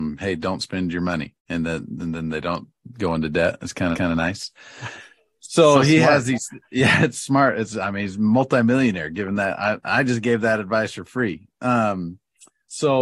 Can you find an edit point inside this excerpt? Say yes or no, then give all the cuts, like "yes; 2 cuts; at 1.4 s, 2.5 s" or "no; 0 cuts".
yes; 2 cuts; at 1.4 s, 3.9 s